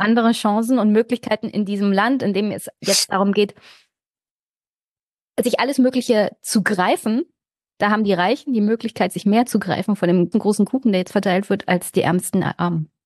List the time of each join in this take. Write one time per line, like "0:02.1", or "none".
0:10.3